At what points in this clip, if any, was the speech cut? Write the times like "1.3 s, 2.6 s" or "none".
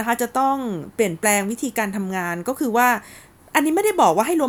none